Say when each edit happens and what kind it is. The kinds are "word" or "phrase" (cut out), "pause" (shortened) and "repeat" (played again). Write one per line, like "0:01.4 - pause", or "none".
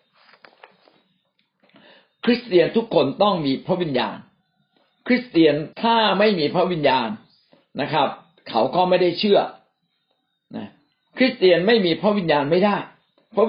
0:05.7 - pause